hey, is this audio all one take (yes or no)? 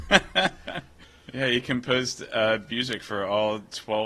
yes